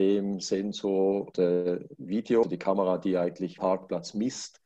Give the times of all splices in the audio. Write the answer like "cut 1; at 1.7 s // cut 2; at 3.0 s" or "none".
cut 1; at 1.3 s // cut 2; at 2.4 s // cut 3; at 3.6 s

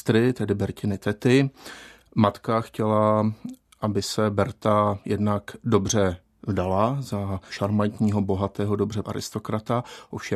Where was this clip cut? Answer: cut 1; at 7.5 s // cut 2; at 9.0 s

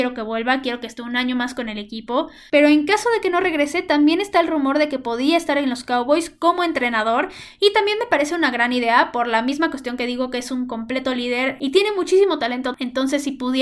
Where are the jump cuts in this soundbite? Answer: none

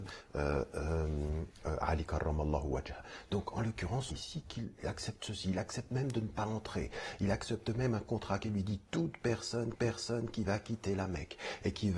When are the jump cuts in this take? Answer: cut 1; at 4.1 s // cut 2; at 9.8 s

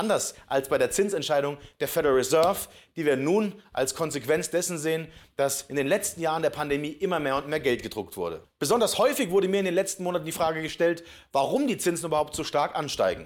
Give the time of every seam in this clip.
none

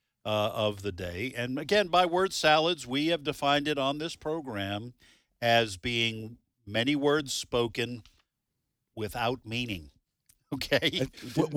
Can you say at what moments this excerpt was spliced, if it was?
none

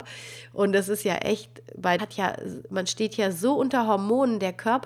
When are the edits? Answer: cut 1; at 2.0 s

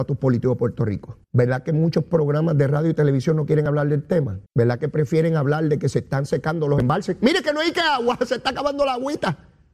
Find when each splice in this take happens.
cut 1; at 1.2 s // cut 2; at 4.5 s

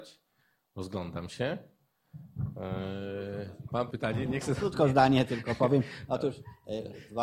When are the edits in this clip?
cut 1; at 3.9 s

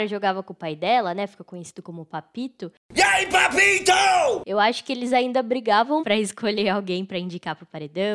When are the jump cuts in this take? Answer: cut 1; at 6.0 s

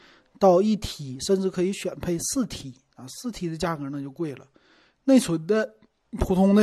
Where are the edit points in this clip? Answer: none

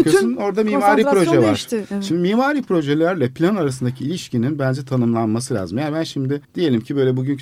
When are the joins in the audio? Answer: cut 1; at 6.4 s

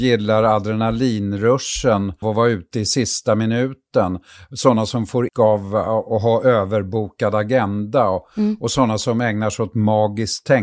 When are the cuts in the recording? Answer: cut 1; at 2.2 s // cut 2; at 5.3 s

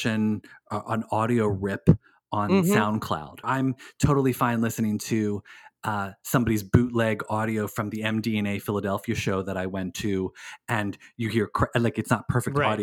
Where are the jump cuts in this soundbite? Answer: cut 1; at 3.4 s

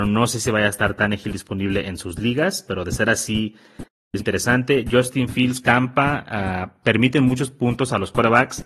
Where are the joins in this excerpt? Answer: cut 1; at 4.2 s // cut 2; at 5.6 s

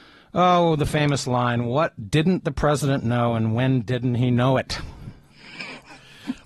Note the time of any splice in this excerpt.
none

